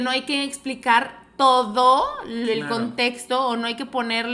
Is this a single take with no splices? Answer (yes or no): yes